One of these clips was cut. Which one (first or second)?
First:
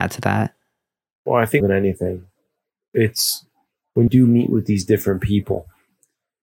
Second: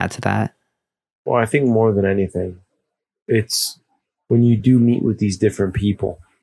first